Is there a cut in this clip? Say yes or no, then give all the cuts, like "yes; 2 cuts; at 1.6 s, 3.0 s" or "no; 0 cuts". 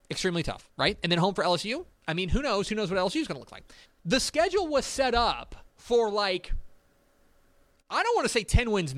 yes; 3 cuts; at 1.9 s, 3.8 s, 5.7 s